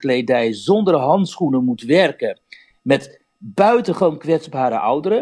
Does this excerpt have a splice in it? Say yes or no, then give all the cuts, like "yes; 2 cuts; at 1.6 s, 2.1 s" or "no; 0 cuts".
no; 0 cuts